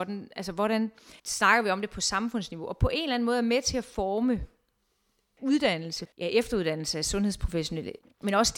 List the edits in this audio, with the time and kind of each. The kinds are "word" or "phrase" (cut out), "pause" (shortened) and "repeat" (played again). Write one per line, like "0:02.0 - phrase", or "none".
0:01.2 - pause
0:06.1 - pause